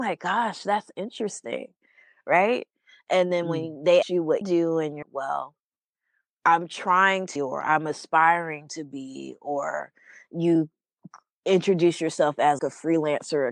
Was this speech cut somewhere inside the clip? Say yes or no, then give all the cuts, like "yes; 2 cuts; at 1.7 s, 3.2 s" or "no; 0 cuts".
yes; 5 cuts; at 4.0 s, 4.4 s, 5.0 s, 7.4 s, 12.6 s